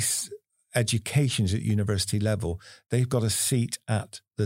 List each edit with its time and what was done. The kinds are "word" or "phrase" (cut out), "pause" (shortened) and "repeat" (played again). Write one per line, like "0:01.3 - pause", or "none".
none